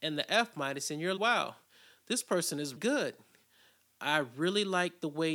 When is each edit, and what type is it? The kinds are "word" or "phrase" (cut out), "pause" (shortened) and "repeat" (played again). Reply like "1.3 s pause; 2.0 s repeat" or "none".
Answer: 1.2 s word; 2.8 s word